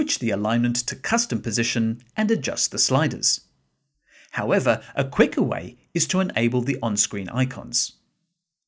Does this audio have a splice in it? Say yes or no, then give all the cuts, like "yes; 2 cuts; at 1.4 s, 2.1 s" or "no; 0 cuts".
no; 0 cuts